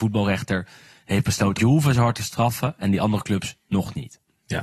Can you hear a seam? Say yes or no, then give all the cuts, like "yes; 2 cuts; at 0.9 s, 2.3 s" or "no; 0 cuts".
yes; 1 cut; at 1.6 s